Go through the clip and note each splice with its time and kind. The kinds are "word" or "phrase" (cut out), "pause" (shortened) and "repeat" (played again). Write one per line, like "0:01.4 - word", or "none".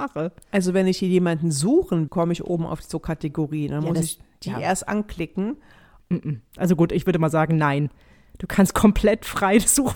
0:02.1 - phrase

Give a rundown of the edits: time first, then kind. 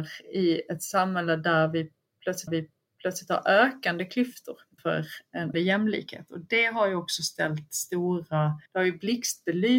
0:02.5 - repeat
0:04.8 - word
0:05.5 - word
0:08.7 - pause

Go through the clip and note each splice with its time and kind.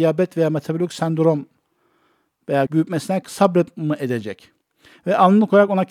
0:02.7 - word
0:03.2 - word

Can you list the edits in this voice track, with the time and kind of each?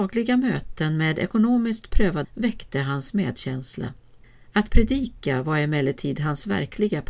0:02.2 - word
0:04.2 - pause

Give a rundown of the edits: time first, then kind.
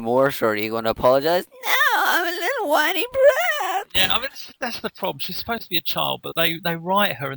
none

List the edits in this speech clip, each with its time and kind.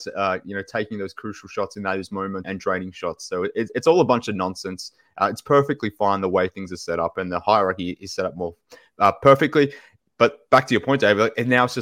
0:02.4 - word

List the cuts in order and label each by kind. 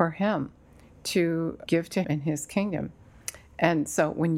0:01.7 - word
0:02.0 - word

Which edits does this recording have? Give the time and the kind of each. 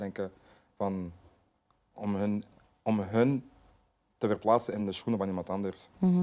none

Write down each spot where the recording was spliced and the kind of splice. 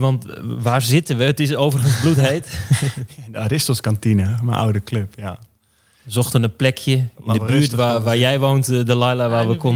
none

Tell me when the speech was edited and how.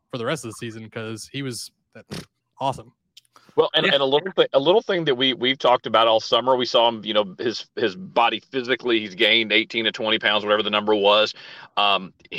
0:02.4 - pause

